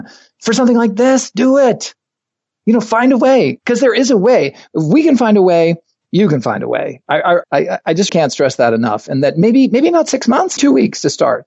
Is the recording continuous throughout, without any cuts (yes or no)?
no